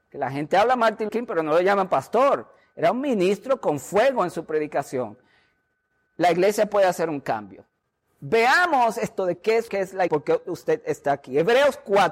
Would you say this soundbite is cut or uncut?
cut